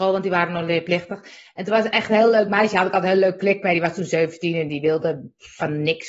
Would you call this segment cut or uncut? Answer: uncut